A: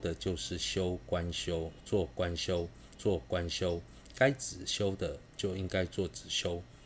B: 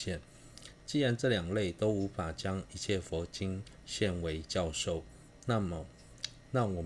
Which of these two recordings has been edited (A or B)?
A